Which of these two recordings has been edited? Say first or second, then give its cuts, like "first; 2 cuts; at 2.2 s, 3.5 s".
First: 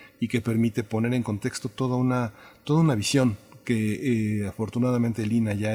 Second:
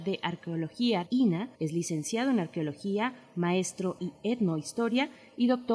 second; 3 cuts; at 1.1 s, 1.5 s, 4.0 s